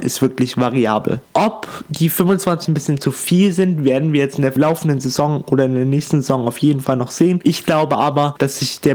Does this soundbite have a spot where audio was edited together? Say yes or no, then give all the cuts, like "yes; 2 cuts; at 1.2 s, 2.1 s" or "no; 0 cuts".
yes; 1 cut; at 2.7 s